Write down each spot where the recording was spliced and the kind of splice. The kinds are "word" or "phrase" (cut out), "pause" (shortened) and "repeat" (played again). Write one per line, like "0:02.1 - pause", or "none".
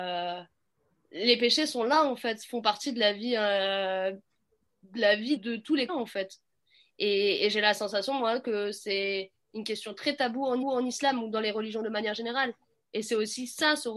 0:05.4 - word
0:05.9 - word
0:10.6 - repeat